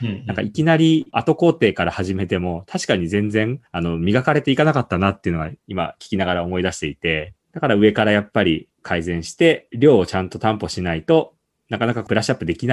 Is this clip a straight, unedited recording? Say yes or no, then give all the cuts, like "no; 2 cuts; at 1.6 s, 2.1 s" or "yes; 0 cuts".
no; 3 cuts; at 3.7 s, 5.6 s, 8.7 s